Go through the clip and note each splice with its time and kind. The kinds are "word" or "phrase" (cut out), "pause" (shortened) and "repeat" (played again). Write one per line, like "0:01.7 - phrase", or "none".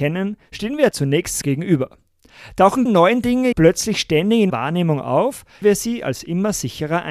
0:00.9 - word
0:01.4 - word
0:02.9 - word
0:03.5 - word
0:04.5 - word
0:05.6 - word